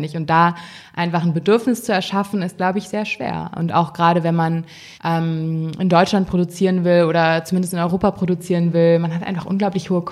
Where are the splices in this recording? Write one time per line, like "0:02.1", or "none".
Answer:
0:04.9